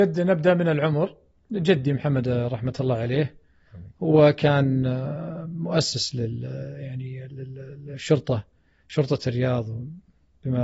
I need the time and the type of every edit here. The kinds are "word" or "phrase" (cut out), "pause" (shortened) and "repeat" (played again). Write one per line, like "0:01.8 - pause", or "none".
none